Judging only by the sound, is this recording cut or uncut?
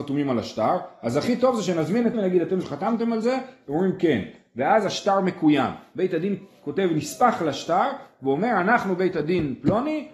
cut